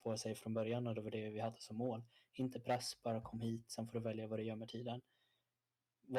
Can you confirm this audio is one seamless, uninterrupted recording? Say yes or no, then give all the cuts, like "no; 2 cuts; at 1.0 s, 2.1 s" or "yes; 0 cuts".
yes; 0 cuts